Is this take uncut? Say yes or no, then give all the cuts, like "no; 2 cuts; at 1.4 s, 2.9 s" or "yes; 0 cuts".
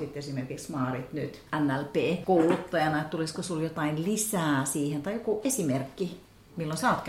no; 1 cut; at 1.5 s